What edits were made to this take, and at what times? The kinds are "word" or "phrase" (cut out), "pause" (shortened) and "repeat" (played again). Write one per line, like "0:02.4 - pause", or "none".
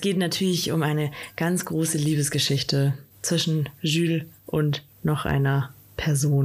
0:03.1 - pause

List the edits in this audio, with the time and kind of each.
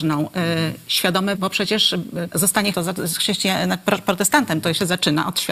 0:01.4 - word
0:02.3 - word
0:02.7 - word

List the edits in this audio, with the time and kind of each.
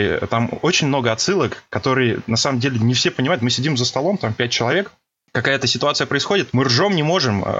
0:06.5 - word

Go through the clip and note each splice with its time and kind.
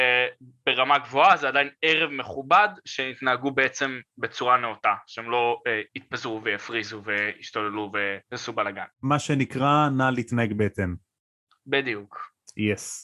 0:05.9 - pause
0:08.2 - pause
0:08.9 - pause

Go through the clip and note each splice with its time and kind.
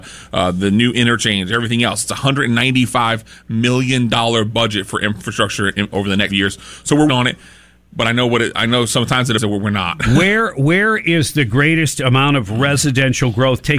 0:05.9 - word
0:06.3 - word
0:07.1 - word
0:09.4 - word

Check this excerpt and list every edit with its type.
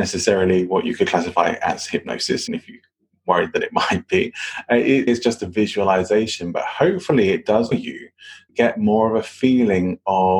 0:02.5 - word
0:05.1 - word
0:07.7 - word
0:08.5 - word

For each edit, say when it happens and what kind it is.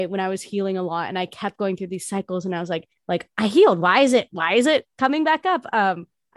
0:03.0 - pause

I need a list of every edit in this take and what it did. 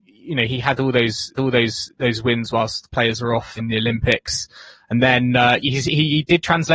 0:01.4 - repeat
0:03.6 - word

